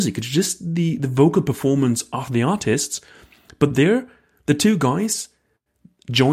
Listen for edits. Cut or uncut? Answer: uncut